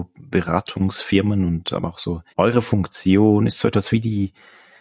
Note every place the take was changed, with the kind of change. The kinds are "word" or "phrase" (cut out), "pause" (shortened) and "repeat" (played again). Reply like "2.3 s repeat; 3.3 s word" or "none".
2.3 s pause

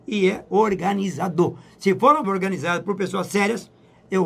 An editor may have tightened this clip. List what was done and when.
2.2 s word

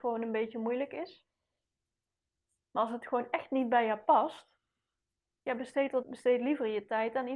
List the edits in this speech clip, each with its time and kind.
6.0 s word

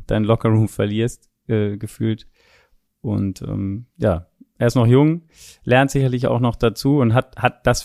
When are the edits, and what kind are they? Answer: none

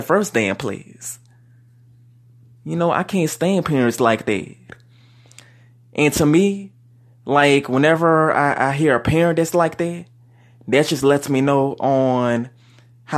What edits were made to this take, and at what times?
none

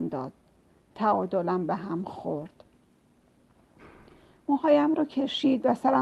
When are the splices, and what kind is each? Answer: none

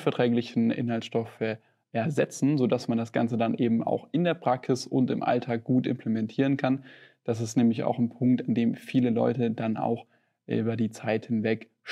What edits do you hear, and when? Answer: none

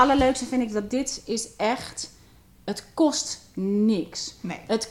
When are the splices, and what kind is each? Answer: none

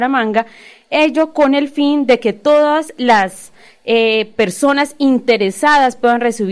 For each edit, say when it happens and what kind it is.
none

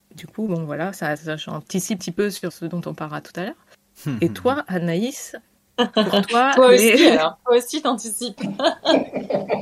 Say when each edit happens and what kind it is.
1.2 s word; 2.0 s word; 2.5 s word

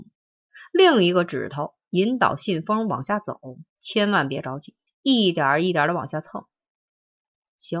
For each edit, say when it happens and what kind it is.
3.7 s pause; 4.9 s pause

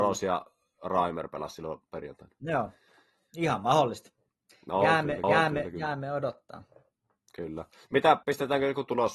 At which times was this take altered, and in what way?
5.2 s repeat; 8.2 s pause

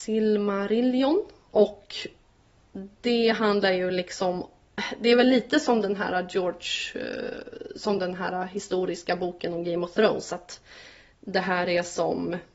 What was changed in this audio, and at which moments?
none

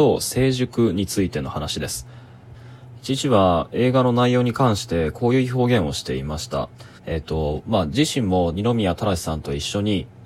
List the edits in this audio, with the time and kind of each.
7.0 s pause

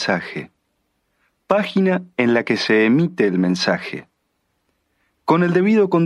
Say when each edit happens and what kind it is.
none

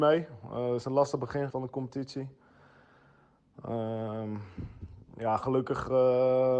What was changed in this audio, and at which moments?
1.5 s word

